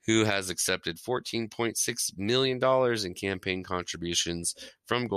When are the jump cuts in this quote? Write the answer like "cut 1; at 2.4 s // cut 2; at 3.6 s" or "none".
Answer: none